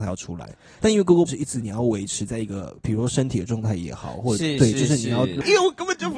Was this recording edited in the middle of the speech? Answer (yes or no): yes